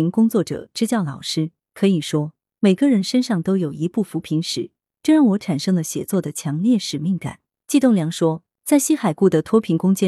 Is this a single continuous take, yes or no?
yes